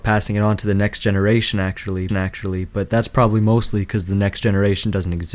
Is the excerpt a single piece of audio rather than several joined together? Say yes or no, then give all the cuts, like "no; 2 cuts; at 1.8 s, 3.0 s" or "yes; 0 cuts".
no; 1 cut; at 2.1 s